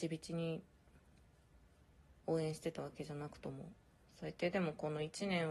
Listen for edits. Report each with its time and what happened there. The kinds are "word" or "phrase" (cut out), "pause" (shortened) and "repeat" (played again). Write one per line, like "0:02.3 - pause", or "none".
0:02.2 - pause
0:03.8 - pause

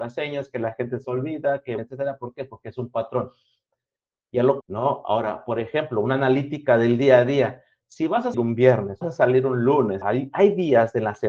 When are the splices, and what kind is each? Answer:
0:01.0 - word
0:01.8 - word
0:04.6 - word
0:08.3 - word
0:09.0 - word
0:10.0 - word

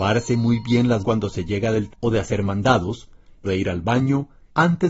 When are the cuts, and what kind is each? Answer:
0:01.0 - word
0:01.9 - word
0:03.4 - word

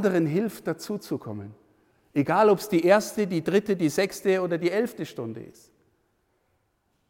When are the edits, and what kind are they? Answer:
none

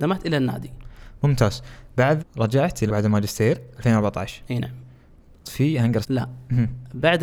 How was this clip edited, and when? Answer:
0:02.2 - word
0:02.9 - word
0:05.4 - word
0:06.0 - word

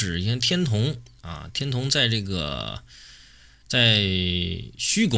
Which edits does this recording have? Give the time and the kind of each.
none

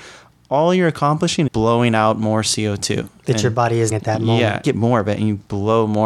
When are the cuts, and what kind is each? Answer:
0:01.5 - word
0:03.9 - word
0:04.6 - phrase

